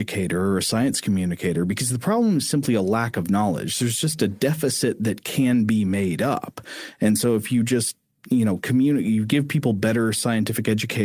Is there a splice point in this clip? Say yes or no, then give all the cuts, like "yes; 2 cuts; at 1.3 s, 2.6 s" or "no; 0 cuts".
no; 0 cuts